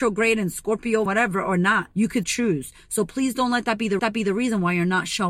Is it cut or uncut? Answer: cut